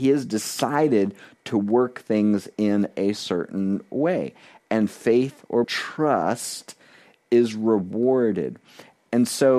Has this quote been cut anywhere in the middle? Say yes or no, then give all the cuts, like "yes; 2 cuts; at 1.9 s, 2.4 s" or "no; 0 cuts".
yes; 1 cut; at 5.6 s